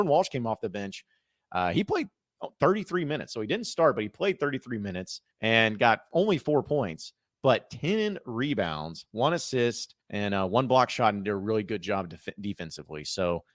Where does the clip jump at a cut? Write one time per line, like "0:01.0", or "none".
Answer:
0:05.3
0:10.0